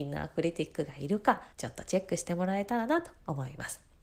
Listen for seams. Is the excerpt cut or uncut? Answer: cut